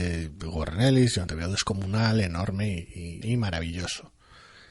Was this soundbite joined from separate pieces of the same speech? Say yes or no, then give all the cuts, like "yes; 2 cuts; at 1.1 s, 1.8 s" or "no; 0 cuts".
yes; 2 cuts; at 1.3 s, 3.2 s